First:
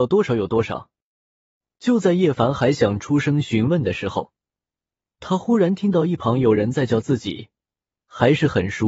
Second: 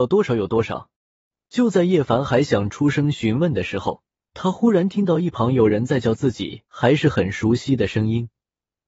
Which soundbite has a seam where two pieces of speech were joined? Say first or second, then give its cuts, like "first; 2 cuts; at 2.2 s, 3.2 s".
second; 3 cuts; at 1.0 s, 4.1 s, 6.7 s